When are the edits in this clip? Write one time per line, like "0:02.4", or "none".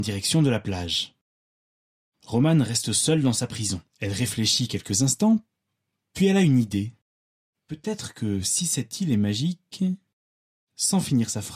0:03.9